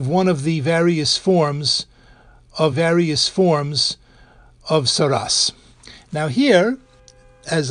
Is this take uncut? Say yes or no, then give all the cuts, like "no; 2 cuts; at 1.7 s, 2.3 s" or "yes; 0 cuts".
no; 1 cut; at 2.7 s